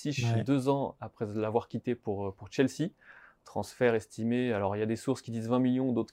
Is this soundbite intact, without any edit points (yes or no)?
yes